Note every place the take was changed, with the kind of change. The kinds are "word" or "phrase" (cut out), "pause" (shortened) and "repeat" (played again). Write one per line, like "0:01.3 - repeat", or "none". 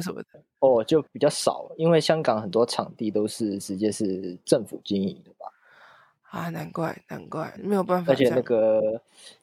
0:01.1 - pause
0:07.6 - word